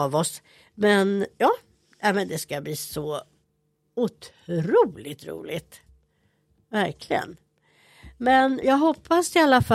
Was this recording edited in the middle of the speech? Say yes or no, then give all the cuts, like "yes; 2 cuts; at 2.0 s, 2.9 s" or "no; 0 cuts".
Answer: yes; 1 cut; at 8.6 s